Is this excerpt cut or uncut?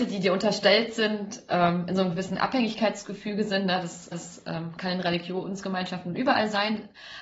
cut